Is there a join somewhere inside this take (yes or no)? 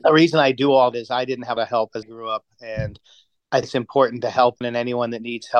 yes